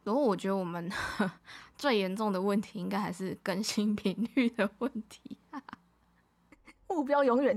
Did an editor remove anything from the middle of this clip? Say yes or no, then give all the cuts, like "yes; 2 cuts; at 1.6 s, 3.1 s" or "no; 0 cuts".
no; 0 cuts